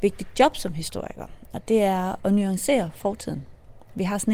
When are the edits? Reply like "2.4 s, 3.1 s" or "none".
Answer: 2.2 s